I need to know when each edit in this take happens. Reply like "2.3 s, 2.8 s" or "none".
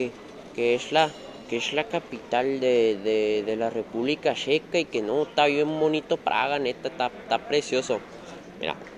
2.6 s